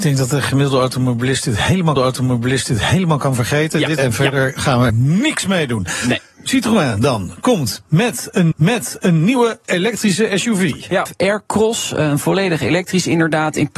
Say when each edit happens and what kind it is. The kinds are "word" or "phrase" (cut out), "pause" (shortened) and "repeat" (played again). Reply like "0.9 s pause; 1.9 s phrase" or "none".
2.0 s repeat; 4.0 s phrase; 4.9 s word; 8.5 s repeat; 11.1 s phrase